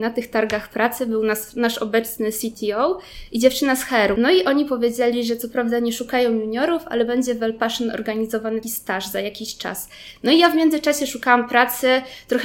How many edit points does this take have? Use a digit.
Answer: 1